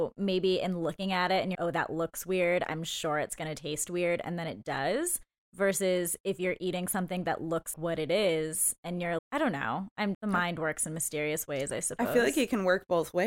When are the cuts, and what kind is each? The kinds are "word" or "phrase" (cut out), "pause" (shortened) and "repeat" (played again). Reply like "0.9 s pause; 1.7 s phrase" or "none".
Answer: 1.5 s word; 7.7 s word; 9.2 s word; 10.1 s word

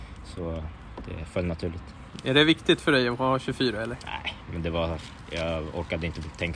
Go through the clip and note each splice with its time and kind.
none

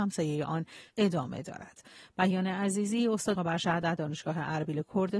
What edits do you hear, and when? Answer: 3.3 s word

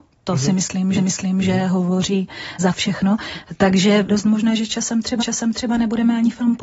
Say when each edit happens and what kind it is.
0.9 s repeat; 2.6 s word; 4.1 s word; 5.2 s repeat

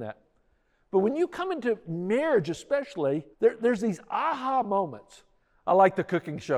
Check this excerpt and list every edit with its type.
3.3 s pause

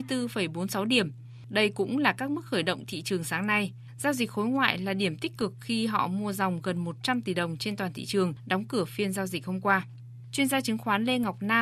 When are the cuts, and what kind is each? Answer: none

